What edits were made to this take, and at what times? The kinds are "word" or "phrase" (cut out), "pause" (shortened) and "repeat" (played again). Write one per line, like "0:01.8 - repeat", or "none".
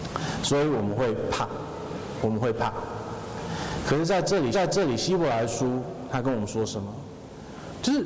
0:04.5 - repeat